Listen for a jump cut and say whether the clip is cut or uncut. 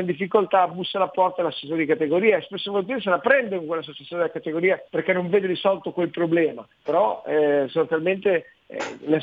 cut